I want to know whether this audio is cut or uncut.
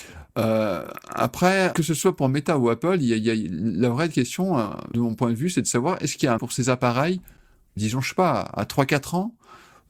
cut